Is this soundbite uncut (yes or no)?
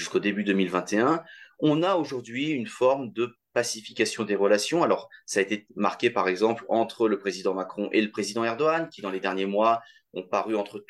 yes